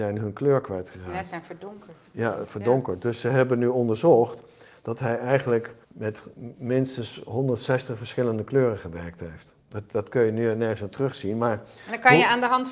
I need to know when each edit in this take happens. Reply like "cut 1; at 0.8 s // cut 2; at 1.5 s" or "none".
cut 1; at 5.8 s